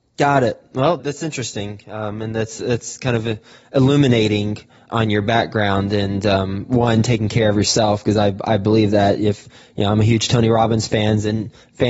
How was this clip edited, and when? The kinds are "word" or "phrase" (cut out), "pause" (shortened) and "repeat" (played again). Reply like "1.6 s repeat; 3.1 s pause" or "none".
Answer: none